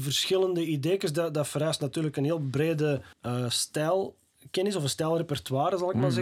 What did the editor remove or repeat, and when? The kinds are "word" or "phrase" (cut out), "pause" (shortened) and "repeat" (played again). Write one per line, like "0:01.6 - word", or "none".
0:03.1 - pause